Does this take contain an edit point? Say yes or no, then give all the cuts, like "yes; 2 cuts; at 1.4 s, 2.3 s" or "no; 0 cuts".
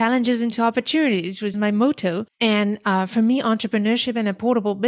yes; 2 cuts; at 1.5 s, 2.3 s